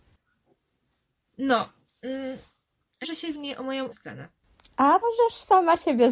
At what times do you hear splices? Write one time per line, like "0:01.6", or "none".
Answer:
0:03.0
0:03.3
0:03.9
0:05.0